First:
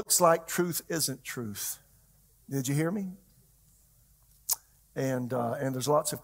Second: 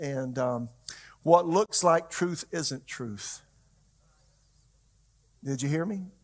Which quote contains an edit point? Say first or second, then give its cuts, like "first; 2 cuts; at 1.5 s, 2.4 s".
first; 1 cut; at 2.2 s